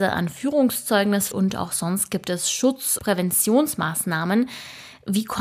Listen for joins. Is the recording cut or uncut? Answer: cut